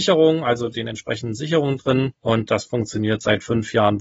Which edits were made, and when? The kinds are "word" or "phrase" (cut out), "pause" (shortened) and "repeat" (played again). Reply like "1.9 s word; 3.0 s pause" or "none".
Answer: 2.5 s word